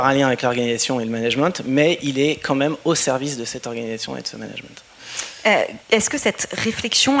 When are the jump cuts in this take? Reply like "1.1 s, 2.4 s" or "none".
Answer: 5.8 s